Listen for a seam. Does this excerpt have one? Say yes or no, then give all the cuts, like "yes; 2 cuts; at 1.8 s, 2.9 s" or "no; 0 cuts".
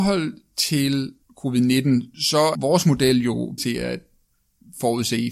yes; 3 cuts; at 1.2 s, 2.5 s, 3.6 s